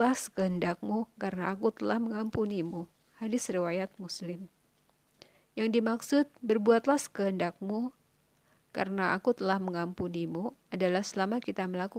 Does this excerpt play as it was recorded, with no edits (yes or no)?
yes